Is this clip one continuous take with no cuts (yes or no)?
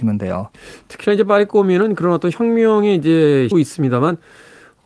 no